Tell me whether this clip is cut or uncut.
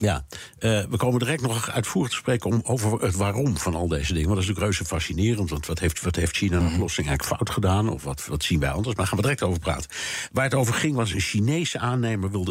uncut